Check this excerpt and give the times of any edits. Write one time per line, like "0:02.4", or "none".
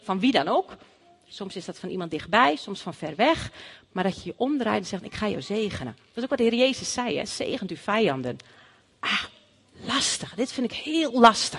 none